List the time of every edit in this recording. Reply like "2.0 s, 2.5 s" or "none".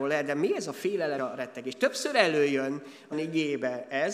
1.2 s, 3.1 s